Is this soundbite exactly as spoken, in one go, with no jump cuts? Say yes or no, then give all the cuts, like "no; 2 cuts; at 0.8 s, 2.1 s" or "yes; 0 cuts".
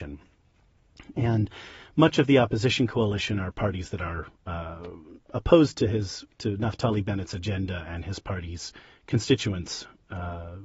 yes; 0 cuts